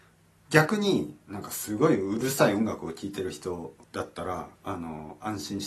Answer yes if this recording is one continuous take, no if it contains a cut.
no